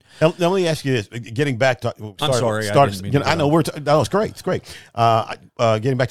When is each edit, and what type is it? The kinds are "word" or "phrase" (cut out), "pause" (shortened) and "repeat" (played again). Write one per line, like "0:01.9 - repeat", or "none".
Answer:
0:01.8 - phrase